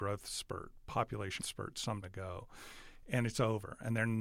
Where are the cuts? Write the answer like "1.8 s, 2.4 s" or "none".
1.4 s, 2.0 s